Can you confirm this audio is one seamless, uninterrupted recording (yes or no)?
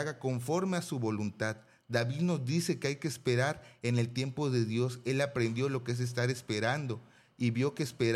yes